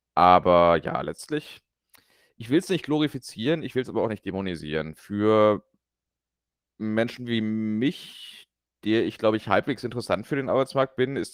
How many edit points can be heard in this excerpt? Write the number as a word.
zero